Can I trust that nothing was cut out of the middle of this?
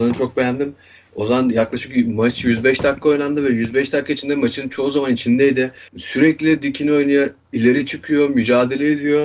no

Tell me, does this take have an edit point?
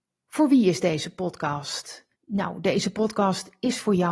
yes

